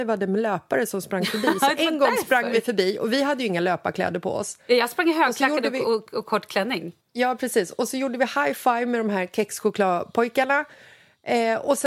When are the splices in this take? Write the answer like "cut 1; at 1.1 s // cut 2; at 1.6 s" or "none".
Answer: cut 1; at 7.0 s

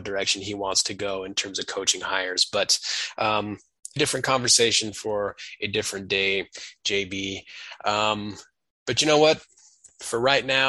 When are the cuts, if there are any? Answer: cut 1; at 4.0 s

